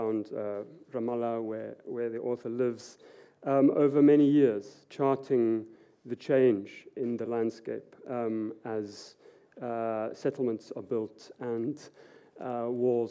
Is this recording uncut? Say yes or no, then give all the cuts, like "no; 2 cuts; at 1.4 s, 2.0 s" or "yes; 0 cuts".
yes; 0 cuts